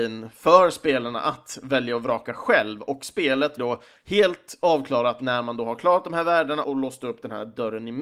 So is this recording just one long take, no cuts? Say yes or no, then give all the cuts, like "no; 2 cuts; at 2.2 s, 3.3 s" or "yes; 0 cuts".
no; 2 cuts; at 3.6 s, 6.6 s